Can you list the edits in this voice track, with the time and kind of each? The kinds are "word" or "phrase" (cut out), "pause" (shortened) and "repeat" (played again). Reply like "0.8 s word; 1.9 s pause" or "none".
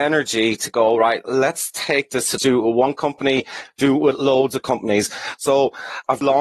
2.4 s phrase